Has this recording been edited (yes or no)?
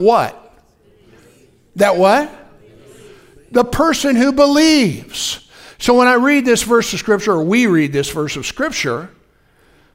no